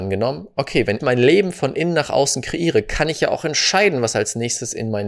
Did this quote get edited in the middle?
yes; 1 cut; at 1.0 s

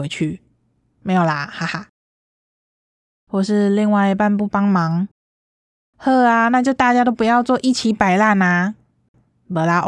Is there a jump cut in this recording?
no; 0 cuts

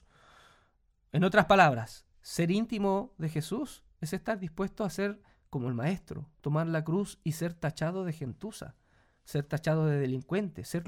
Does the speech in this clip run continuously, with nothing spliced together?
no; 1 cut; at 2.1 s

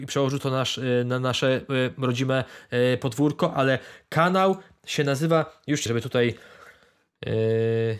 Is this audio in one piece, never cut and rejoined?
no; 1 cut; at 5.9 s

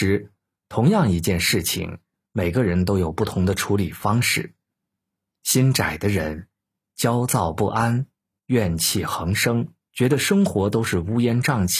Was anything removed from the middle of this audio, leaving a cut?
yes; 1 cut; at 9.8 s

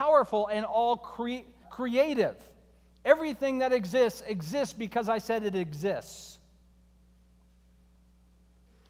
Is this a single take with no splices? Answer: no; 1 cut; at 1.6 s

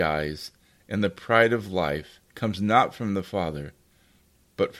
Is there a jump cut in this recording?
yes; 1 cut; at 2.3 s

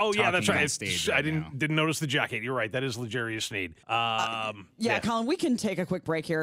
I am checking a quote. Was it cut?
yes; 1 cut; at 3.8 s

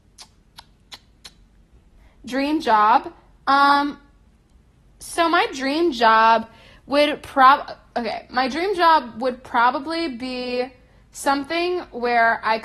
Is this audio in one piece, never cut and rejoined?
yes; 0 cuts

